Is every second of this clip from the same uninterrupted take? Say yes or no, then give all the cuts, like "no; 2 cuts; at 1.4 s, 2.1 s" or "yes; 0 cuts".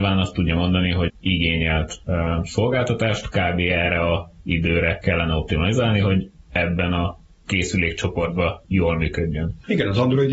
no; 1 cut; at 1.1 s